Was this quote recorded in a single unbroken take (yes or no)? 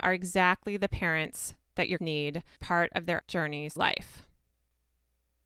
no